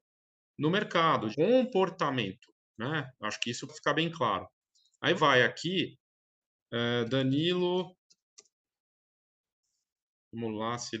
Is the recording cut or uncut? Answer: cut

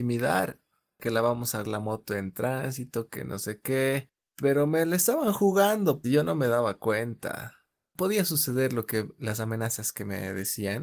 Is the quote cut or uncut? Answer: cut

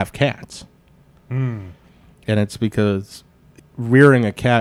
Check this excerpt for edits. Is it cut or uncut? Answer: cut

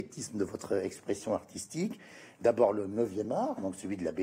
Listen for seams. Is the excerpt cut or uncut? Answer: uncut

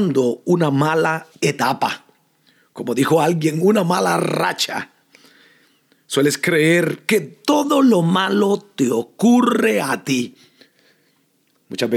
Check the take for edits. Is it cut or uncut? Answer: cut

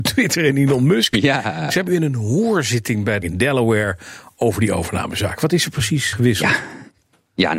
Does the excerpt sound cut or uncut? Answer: cut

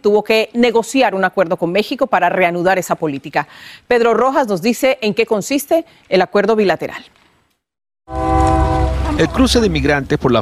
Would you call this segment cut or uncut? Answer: uncut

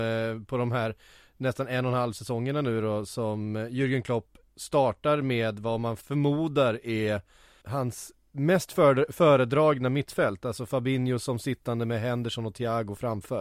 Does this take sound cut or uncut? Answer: cut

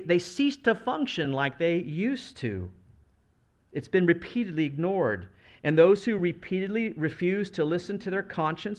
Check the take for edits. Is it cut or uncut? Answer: uncut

